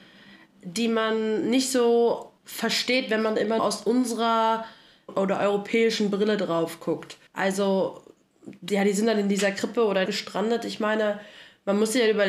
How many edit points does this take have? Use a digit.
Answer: 6